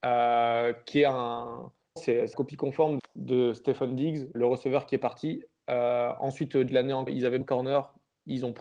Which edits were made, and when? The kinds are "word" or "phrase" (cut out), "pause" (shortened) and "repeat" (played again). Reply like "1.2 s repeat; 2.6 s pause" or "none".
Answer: 2.0 s word; 2.3 s word; 3.0 s word; 4.3 s word; 6.7 s word; 7.1 s word; 7.4 s word